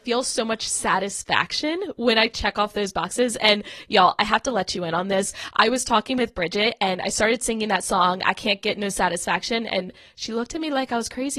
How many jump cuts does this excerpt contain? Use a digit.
0